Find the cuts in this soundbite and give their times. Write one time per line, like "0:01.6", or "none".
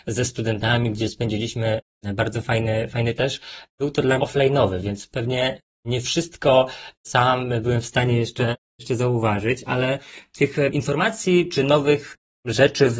0:03.2
0:04.2
0:07.0